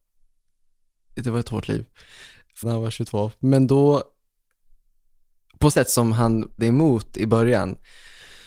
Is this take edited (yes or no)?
yes